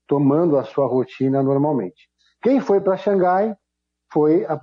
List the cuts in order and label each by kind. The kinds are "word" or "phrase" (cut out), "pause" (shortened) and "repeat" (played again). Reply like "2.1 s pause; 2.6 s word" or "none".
none